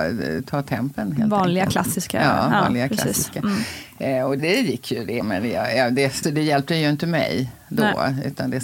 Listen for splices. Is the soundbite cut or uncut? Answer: cut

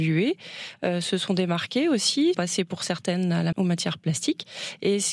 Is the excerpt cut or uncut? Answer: cut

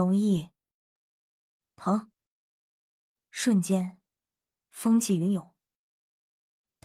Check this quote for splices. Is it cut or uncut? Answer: uncut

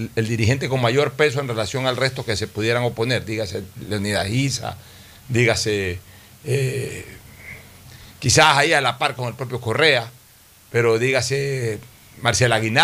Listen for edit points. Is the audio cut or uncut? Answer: uncut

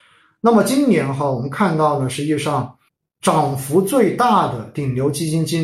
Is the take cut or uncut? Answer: cut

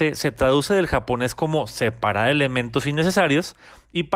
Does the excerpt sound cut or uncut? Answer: uncut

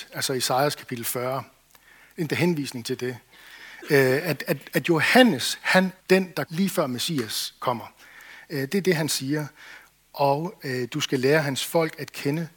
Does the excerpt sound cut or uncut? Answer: cut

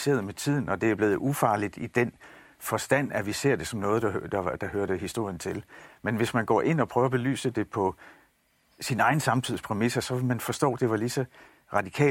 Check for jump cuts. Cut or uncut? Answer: uncut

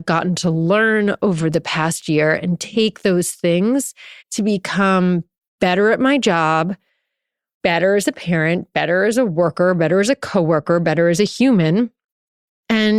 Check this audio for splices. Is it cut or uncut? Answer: cut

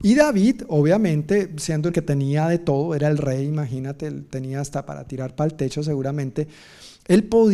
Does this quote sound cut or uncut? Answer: cut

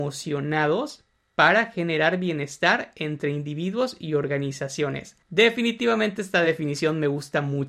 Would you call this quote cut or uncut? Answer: uncut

